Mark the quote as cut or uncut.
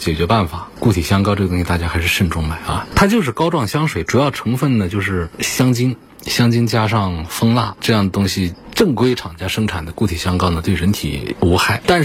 cut